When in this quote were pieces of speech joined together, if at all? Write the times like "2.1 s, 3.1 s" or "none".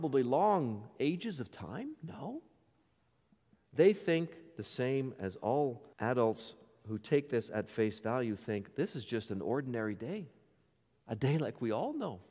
5.9 s